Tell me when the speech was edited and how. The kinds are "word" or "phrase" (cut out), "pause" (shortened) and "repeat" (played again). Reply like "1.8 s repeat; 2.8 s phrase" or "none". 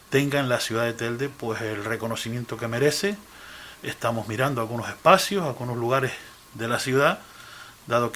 none